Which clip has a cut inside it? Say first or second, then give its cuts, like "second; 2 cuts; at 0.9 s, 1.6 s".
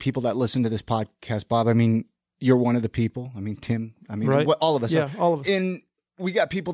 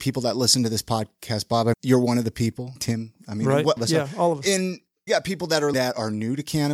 second; 5 cuts; at 1.7 s, 2.8 s, 3.8 s, 5.1 s, 5.7 s